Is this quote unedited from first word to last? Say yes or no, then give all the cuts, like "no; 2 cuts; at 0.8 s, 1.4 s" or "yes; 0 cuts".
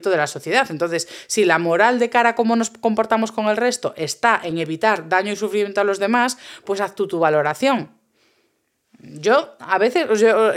yes; 0 cuts